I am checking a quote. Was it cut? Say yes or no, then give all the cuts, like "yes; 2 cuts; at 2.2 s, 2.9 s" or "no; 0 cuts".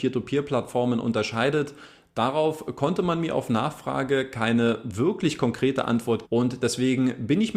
yes; 1 cut; at 6.2 s